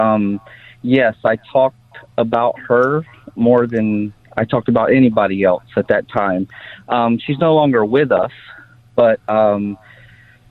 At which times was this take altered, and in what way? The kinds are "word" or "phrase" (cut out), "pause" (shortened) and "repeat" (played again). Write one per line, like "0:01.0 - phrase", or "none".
none